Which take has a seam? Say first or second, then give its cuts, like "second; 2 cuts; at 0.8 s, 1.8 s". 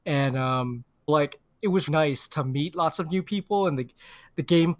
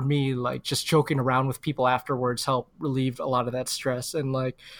first; 2 cuts; at 1.1 s, 1.9 s